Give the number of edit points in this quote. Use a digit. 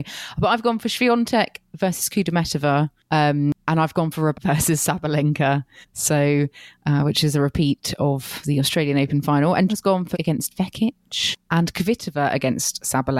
5